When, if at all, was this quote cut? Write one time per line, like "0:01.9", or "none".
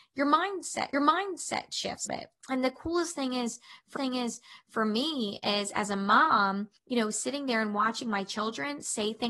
0:00.9
0:02.1
0:02.4
0:04.0
0:06.8